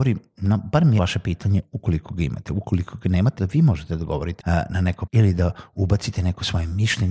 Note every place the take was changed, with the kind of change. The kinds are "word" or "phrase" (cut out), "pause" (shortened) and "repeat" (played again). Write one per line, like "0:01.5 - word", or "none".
0:01.0 - word
0:03.4 - word
0:04.4 - word
0:05.1 - word